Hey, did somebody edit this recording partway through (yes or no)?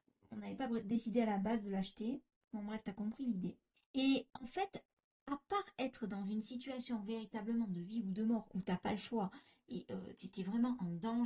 no